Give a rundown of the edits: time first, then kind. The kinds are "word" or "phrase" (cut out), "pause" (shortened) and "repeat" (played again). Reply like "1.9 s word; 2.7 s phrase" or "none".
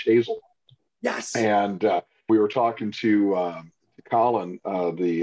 2.3 s word